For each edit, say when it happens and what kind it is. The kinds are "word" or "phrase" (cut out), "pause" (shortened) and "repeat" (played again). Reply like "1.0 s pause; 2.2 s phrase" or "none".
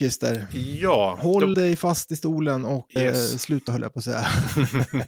1.5 s word; 3.0 s word; 3.7 s word